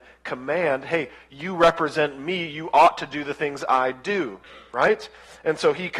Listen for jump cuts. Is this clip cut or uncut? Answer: uncut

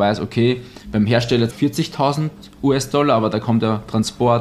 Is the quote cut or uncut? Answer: cut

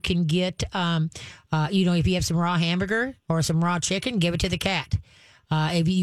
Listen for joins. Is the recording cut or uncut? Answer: uncut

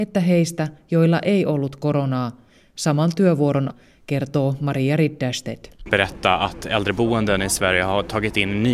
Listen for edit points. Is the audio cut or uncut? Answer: cut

